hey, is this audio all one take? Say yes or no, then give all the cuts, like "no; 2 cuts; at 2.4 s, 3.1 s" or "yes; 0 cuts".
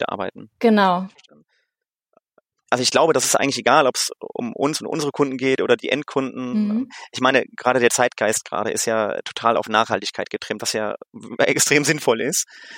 yes; 0 cuts